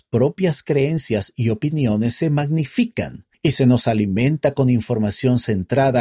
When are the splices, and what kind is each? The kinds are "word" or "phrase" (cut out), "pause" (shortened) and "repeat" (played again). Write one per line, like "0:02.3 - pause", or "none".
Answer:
0:03.3 - pause